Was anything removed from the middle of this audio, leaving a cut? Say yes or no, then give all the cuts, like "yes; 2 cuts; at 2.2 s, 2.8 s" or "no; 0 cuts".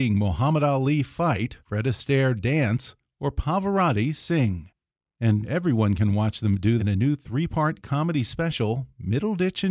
yes; 3 cuts; at 1.6 s, 5.4 s, 6.8 s